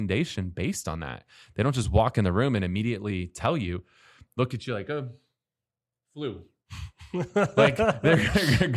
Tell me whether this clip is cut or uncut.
uncut